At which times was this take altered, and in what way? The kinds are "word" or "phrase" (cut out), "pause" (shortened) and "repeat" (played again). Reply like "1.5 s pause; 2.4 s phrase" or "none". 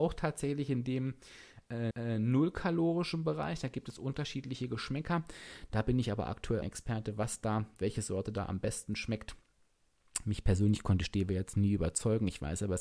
1.9 s repeat; 6.6 s phrase